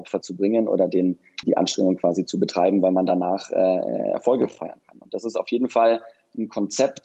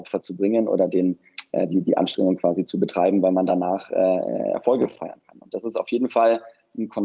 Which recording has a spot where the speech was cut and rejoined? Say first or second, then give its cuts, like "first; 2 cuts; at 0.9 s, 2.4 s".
first; 1 cut; at 1.4 s